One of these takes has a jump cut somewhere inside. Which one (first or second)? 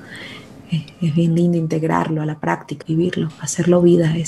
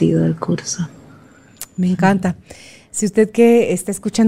first